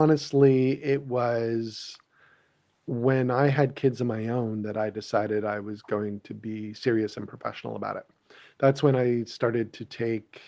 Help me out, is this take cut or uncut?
uncut